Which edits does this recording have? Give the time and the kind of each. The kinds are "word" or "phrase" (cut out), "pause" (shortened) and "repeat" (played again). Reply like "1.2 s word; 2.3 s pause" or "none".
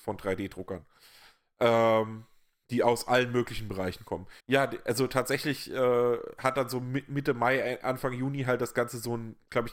4.4 s pause